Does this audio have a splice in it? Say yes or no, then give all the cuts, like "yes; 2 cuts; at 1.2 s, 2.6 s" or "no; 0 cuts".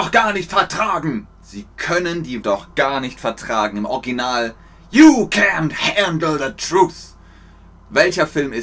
yes; 2 cuts; at 1.3 s, 2.4 s